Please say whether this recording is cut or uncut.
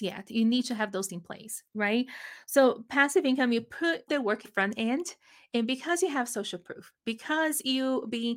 cut